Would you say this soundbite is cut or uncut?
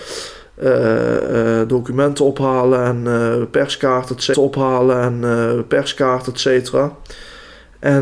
cut